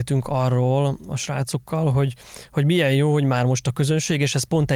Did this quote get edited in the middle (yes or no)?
no